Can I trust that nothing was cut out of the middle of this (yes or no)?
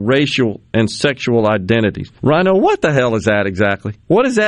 no